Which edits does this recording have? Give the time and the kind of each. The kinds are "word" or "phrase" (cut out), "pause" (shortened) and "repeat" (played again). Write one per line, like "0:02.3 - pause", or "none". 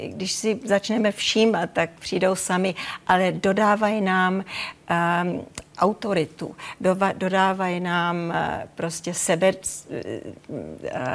none